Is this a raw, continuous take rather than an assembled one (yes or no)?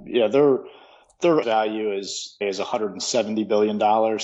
no